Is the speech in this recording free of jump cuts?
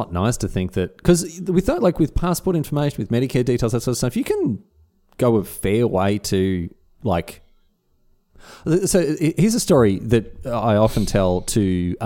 yes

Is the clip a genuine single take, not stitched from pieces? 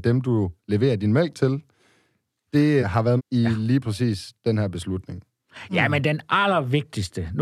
no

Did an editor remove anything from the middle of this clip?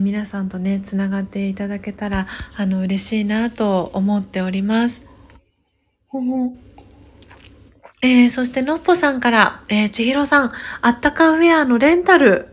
yes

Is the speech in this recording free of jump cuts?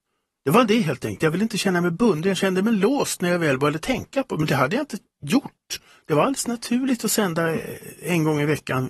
yes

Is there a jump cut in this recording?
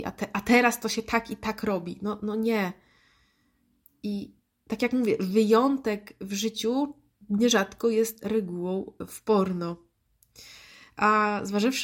no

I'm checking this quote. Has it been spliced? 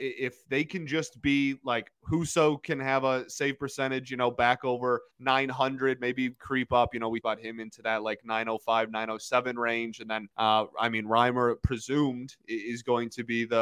yes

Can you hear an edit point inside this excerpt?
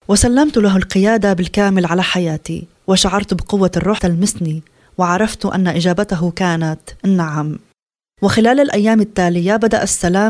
yes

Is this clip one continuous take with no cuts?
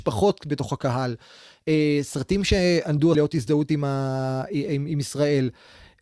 no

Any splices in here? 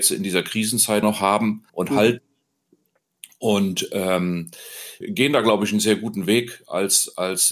yes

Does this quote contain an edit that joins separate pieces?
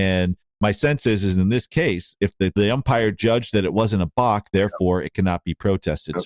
no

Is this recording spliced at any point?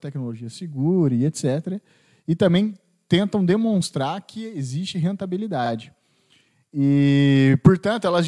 no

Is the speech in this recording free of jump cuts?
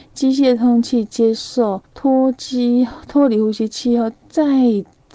no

